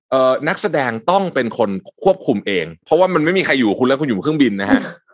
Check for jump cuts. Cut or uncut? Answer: uncut